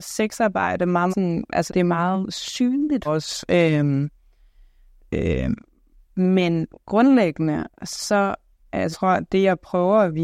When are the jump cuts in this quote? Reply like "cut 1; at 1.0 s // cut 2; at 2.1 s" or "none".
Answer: cut 1; at 1.1 s // cut 2; at 1.7 s // cut 3; at 3.0 s // cut 4; at 8.9 s